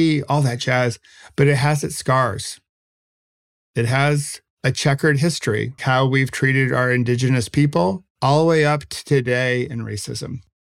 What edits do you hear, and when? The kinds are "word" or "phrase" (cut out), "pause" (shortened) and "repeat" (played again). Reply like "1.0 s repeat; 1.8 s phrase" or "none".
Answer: 4.5 s pause; 5.8 s word; 8.1 s pause